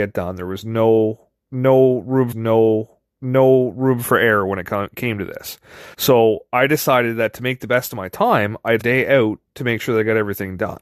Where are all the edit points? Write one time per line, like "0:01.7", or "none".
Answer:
0:02.3
0:05.9
0:08.8